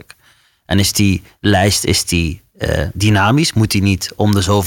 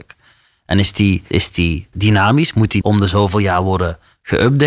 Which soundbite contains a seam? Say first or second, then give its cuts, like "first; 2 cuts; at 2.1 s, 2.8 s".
second; 3 cuts; at 1.3 s, 1.9 s, 2.8 s